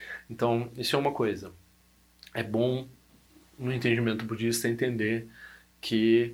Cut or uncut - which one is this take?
uncut